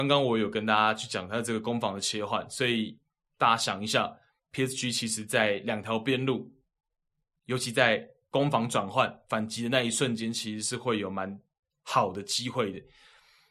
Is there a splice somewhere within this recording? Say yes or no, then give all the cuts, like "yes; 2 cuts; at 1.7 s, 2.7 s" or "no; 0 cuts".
no; 0 cuts